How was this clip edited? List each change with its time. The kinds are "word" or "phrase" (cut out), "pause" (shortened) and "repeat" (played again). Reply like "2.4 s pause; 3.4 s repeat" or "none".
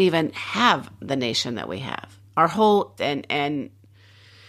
2.3 s pause; 3.0 s word